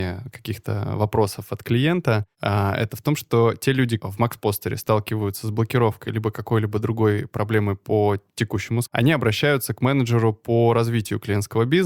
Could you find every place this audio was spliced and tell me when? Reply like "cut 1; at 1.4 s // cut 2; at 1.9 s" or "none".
cut 1; at 2.3 s // cut 2; at 4.0 s // cut 3; at 8.8 s